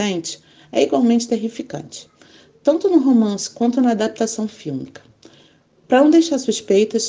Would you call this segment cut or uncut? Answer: uncut